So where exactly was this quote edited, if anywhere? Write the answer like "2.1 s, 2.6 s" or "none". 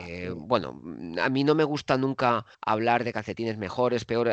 2.5 s